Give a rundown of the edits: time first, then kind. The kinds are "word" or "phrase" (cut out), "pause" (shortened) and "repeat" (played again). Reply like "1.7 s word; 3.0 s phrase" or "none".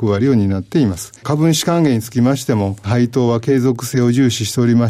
1.2 s pause